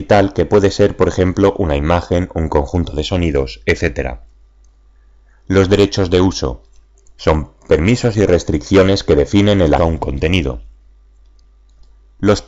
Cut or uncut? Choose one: cut